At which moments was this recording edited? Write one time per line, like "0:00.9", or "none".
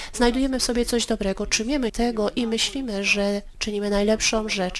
0:01.9